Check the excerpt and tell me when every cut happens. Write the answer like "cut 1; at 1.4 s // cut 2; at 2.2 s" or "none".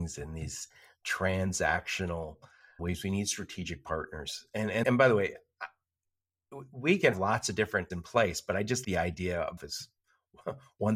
cut 1; at 2.8 s // cut 2; at 4.8 s // cut 3; at 7.1 s // cut 4; at 7.9 s // cut 5; at 8.8 s // cut 6; at 9.6 s